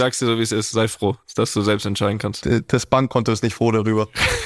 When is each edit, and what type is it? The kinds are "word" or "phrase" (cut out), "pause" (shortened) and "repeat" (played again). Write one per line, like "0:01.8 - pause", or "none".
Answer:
none